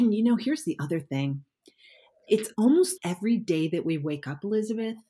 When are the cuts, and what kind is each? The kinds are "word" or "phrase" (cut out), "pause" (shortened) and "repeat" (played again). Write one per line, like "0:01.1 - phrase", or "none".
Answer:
0:03.0 - word